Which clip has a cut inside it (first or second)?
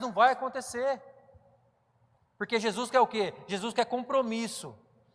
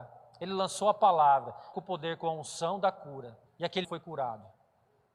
second